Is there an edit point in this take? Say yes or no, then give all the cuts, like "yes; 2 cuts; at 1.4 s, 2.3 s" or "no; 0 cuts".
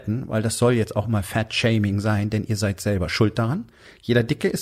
no; 0 cuts